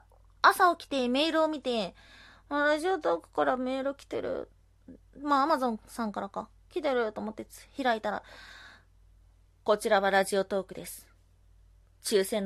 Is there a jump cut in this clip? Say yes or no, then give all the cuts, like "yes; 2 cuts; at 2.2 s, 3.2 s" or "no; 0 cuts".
no; 0 cuts